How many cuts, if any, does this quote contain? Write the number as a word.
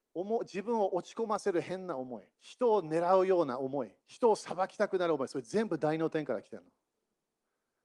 two